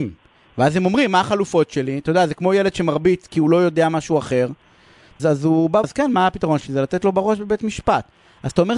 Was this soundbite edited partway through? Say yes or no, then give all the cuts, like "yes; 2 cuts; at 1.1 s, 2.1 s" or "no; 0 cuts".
yes; 2 cuts; at 5.2 s, 5.8 s